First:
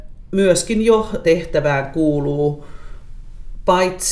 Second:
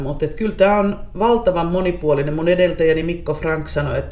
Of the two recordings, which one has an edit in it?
first; 1 cut; at 1.2 s

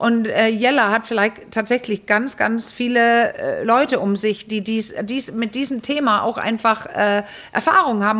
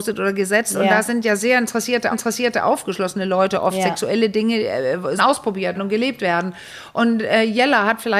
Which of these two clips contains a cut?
second; 3 cuts; at 2.1 s, 5.2 s, 5.7 s

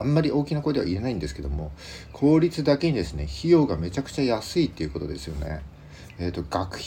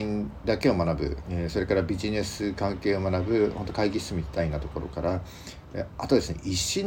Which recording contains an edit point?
second; 1 cut; at 1.2 s

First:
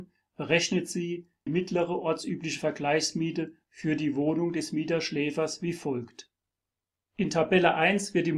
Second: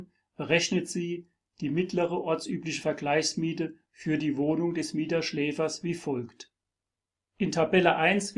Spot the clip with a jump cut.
first; 1 cut; at 1.5 s

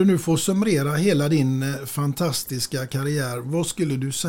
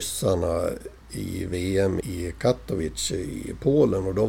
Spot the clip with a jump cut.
second; 2 cuts; at 1.0 s, 2.0 s

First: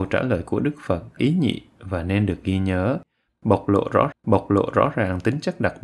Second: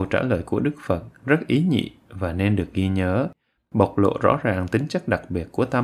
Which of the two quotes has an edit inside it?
first; 2 cuts; at 1.2 s, 4.1 s

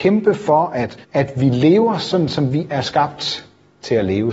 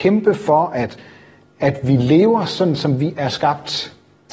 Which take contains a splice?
first; 1 cut; at 1.0 s

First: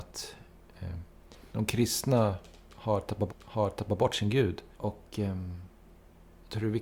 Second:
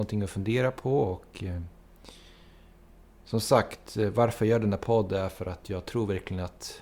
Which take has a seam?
first; 3 cuts; at 1.5 s, 3.3 s, 4.7 s

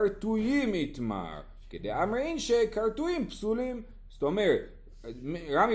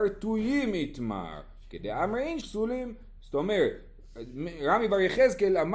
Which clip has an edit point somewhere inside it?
second; 1 cut; at 2.4 s

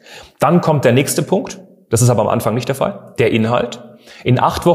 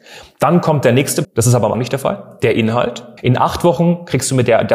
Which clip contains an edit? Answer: second; 3 cuts; at 1.2 s, 1.7 s, 3.2 s

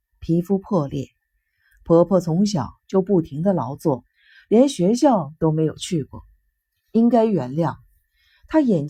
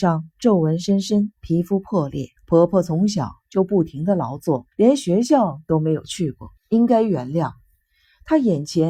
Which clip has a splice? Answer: second; 4 cuts; at 1.4 s, 2.4 s, 4.7 s, 6.6 s

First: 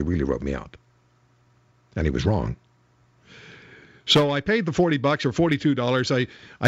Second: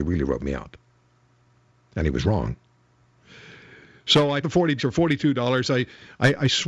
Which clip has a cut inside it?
second; 2 cuts; at 4.4 s, 4.8 s

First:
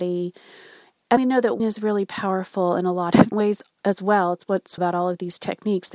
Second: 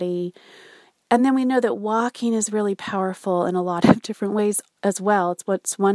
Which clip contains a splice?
first; 4 cuts; at 1.2 s, 1.6 s, 3.3 s, 4.8 s

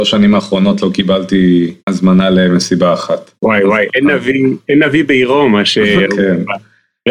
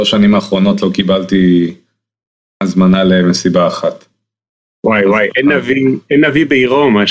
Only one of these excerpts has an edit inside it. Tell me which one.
first; 2 cuts; at 1.8 s, 3.4 s

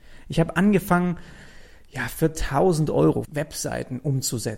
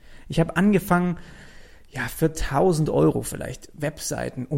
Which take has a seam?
first; 1 cut; at 3.2 s

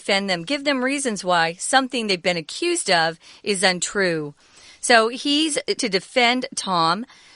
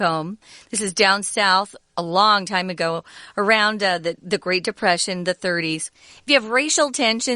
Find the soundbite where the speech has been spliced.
first; 1 cut; at 5.8 s

